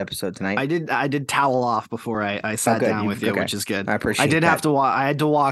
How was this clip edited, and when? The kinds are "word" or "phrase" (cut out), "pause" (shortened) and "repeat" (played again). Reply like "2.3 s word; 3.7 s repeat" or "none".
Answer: none